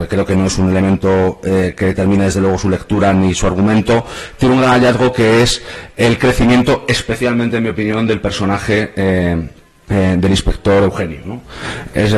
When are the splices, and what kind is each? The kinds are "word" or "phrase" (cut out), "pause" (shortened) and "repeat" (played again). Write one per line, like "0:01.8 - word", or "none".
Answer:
none